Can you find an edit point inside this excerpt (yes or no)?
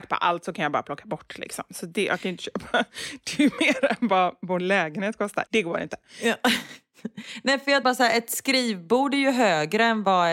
yes